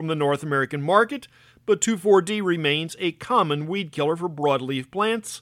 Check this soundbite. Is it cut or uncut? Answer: uncut